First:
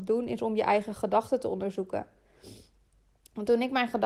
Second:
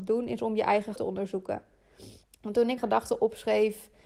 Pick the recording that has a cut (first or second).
second